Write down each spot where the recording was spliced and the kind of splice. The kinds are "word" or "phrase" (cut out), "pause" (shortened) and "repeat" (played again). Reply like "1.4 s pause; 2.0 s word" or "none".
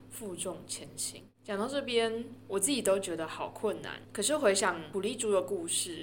1.3 s pause